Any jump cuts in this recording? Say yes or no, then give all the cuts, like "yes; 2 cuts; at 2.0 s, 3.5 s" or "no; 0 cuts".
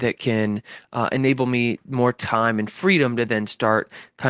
no; 0 cuts